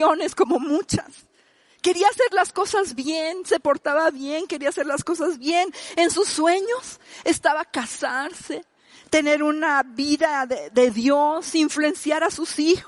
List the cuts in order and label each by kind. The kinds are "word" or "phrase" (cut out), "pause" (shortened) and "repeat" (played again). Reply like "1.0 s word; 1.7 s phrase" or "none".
none